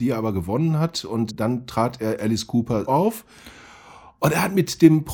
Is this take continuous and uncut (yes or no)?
no